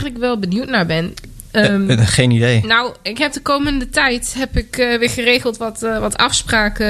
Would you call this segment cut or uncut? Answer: uncut